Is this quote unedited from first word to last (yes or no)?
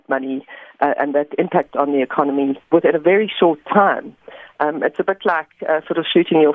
no